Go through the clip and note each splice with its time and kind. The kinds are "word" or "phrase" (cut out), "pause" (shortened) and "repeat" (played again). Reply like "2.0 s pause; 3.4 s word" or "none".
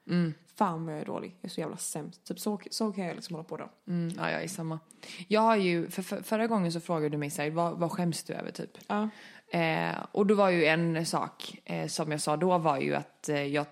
none